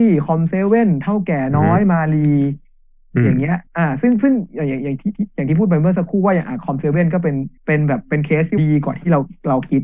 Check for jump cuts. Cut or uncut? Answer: cut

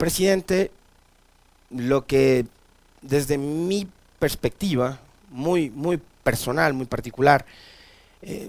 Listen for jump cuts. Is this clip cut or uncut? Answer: uncut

